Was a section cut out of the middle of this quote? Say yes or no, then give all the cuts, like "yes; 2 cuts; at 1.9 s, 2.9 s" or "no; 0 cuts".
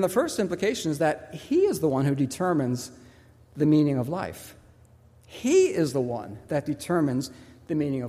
no; 0 cuts